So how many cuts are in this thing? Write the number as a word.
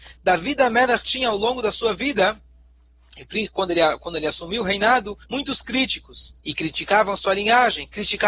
two